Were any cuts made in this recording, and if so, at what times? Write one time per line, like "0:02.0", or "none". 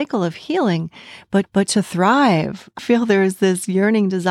0:01.4
0:02.8